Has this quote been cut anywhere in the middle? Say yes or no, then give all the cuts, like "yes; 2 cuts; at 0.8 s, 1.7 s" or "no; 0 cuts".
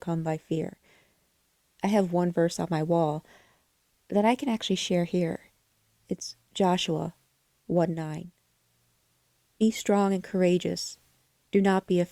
no; 0 cuts